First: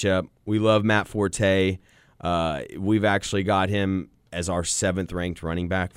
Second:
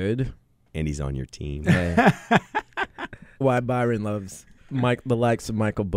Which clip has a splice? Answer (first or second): second